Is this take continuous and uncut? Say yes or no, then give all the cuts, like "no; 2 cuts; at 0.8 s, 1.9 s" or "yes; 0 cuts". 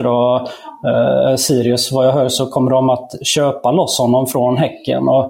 yes; 0 cuts